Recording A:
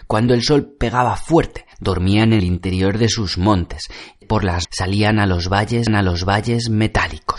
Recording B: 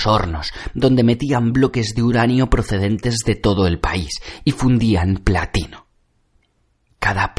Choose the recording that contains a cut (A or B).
A